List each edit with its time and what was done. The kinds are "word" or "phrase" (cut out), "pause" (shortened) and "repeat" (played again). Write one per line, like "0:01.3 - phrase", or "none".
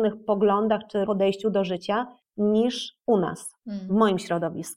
0:01.1 - word
0:03.6 - pause